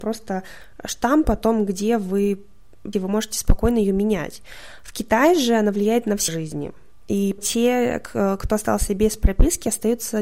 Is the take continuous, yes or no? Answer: no